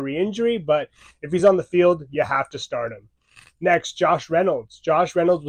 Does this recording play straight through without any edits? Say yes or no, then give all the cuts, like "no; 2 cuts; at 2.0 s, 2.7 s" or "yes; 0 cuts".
yes; 0 cuts